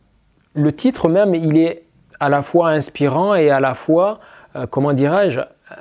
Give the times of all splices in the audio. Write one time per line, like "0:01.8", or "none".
none